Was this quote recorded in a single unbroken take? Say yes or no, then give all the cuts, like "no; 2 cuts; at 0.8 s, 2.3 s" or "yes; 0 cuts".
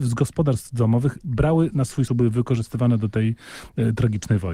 no; 1 cut; at 2.1 s